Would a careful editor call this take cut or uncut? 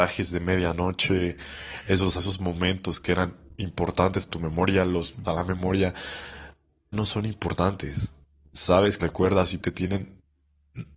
cut